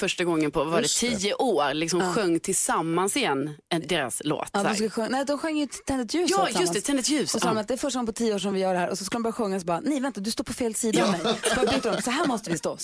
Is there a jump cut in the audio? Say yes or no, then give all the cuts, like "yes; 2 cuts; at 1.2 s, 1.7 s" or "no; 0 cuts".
no; 0 cuts